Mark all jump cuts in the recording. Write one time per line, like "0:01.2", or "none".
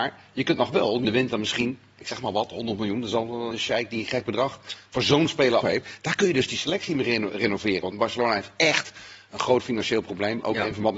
0:01.0
0:03.5
0:05.6